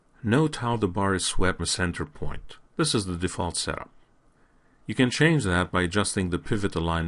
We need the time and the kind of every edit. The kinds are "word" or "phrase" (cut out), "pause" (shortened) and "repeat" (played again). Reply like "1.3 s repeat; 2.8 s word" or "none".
1.6 s word; 2.6 s pause

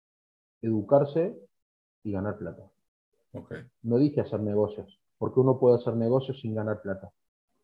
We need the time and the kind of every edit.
5.1 s pause

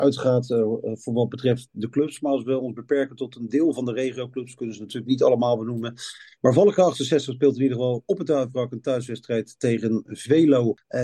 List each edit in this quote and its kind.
none

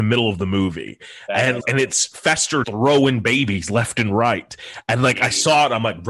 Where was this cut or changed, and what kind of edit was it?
1.6 s word; 2.6 s word

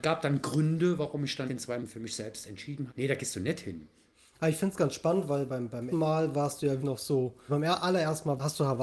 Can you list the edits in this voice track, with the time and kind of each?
1.5 s word; 1.8 s word; 2.9 s word; 5.5 s word; 5.9 s word; 6.8 s word; 7.5 s word

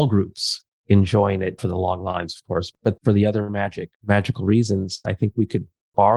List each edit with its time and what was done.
1.6 s phrase; 3.0 s phrase; 3.9 s pause; 5.0 s word

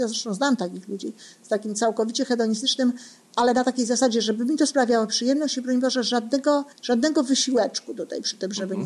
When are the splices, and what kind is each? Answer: 6.7 s pause

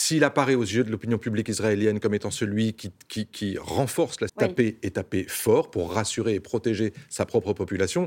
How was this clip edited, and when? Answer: 4.3 s phrase

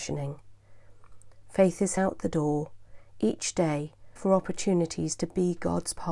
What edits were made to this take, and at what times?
2.0 s word; 4.2 s word

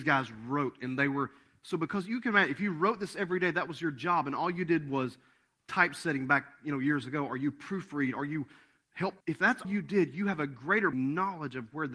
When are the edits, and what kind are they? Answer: 9.2 s pause; 9.6 s word; 10.9 s word

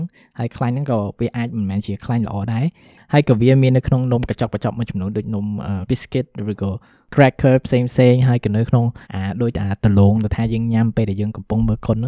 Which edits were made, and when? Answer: 5.9 s word; 9.0 s pause

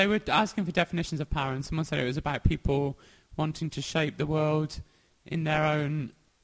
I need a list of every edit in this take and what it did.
none

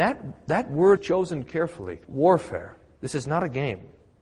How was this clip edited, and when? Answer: 1.0 s word; 2.0 s pause

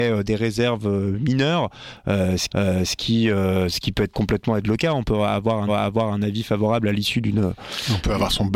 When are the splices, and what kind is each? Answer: 2.5 s repeat; 5.7 s repeat

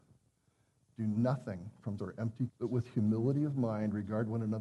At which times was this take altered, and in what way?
2.0 s word; 2.5 s word

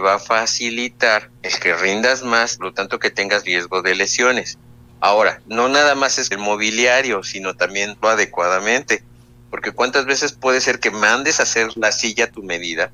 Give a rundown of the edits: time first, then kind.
1.4 s pause; 2.6 s phrase; 3.4 s word; 4.9 s pause; 6.3 s word; 8.0 s word

